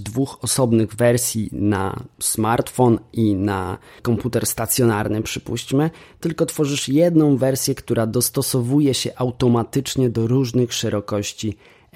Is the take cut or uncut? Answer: uncut